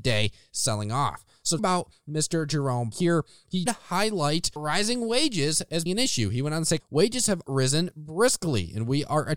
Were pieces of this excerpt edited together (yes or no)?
yes